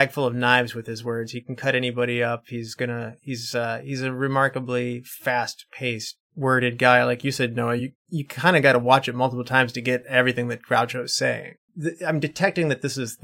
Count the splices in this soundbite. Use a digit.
0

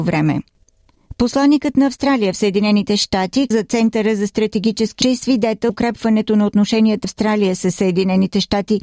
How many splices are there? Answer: 4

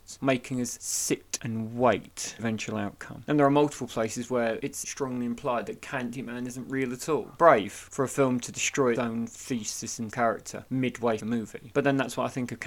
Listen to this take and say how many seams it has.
5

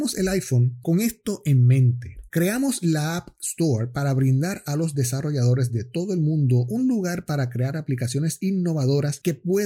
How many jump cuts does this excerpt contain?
0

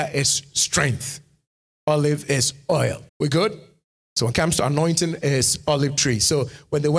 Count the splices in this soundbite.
1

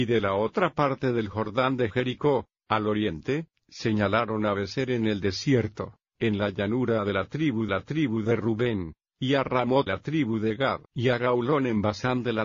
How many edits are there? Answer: 3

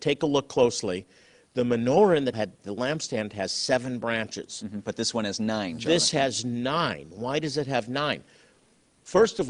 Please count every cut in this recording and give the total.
1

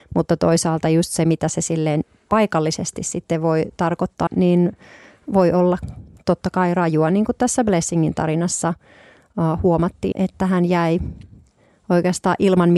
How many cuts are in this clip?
2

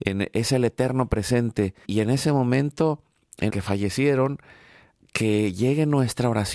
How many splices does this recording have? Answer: 2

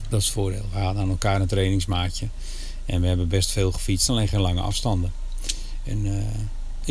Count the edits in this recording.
0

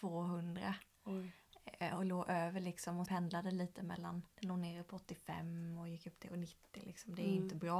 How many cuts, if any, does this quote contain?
2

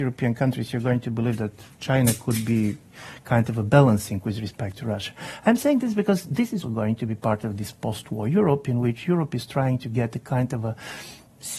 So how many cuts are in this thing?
1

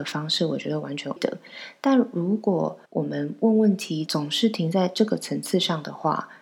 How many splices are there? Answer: 2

